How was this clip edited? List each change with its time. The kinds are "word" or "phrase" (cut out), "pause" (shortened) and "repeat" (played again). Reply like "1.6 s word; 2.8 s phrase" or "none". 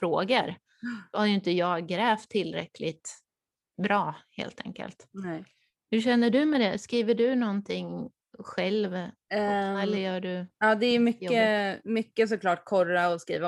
none

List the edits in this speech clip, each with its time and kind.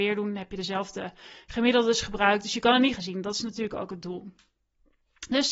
3.0 s phrase

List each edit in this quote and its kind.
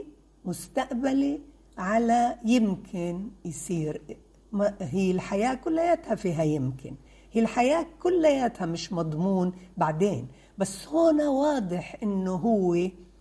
none

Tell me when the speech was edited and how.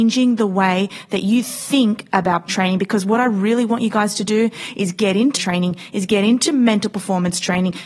2.5 s word; 5.4 s word

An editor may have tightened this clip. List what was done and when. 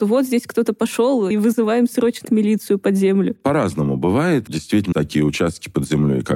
1.3 s word; 2.2 s word; 4.5 s word; 4.9 s word

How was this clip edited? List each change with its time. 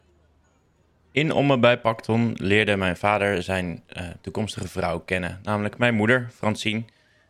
none

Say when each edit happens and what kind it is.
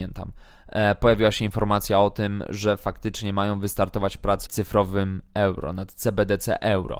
4.5 s word

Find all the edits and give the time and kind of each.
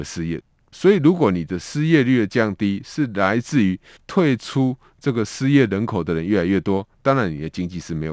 4.0 s pause

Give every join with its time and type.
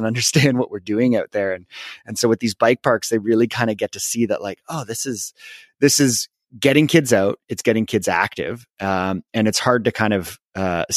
none

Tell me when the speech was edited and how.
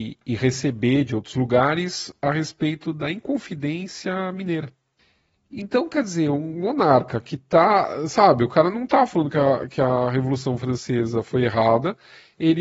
5.0 s pause

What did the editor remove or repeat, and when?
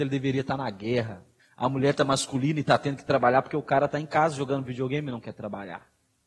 1.4 s pause

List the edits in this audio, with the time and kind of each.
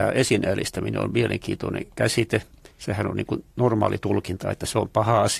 2.7 s pause

